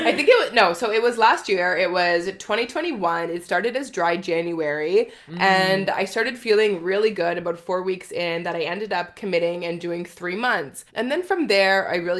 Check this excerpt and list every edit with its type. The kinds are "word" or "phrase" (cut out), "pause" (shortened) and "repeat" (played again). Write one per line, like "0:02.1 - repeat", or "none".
0:10.9 - pause

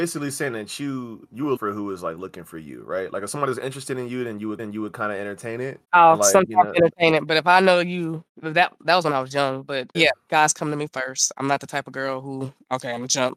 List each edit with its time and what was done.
0:01.6 - word
0:04.6 - repeat
0:05.8 - pause
0:08.3 - pause
0:09.9 - word
0:10.3 - phrase

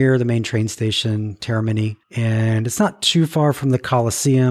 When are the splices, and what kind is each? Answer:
0:02.0 - pause

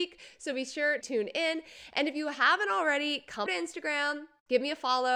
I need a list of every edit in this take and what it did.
0:01.0 - word
0:03.5 - word

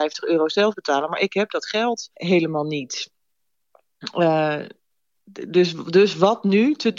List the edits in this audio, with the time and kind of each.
none

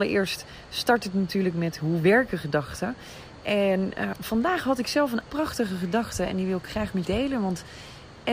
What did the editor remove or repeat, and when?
0:04.1 - word
0:05.2 - word
0:07.0 - word

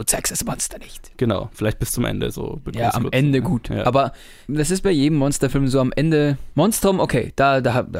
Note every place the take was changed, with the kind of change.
none

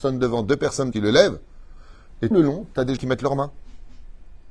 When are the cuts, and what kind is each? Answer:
0:00.9 - word
0:02.3 - word
0:03.0 - word

